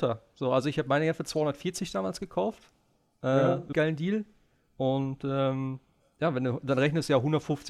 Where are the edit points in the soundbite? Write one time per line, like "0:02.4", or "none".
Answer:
0:03.7